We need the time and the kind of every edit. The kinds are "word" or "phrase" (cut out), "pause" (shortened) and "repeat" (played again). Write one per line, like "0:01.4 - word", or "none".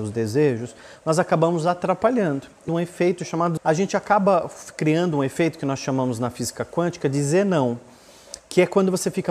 0:02.7 - phrase
0:03.6 - word